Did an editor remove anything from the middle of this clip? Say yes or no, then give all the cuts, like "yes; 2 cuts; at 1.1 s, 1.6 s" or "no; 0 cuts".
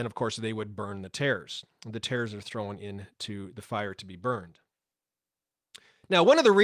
no; 0 cuts